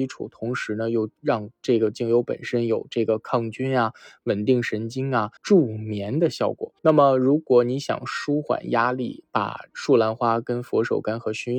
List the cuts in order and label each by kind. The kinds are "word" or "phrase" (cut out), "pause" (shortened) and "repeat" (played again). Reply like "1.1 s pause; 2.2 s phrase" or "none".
5.4 s pause; 6.8 s pause; 9.7 s pause